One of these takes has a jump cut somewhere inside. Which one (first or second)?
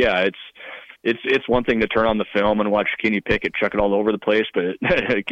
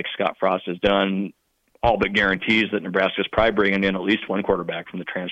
first